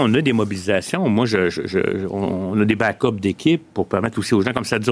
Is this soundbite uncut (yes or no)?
yes